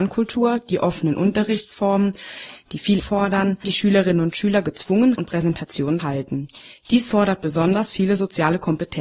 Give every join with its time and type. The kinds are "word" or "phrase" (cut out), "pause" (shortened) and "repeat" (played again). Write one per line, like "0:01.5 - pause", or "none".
0:03.0 - word
0:03.6 - word
0:05.2 - word
0:06.0 - word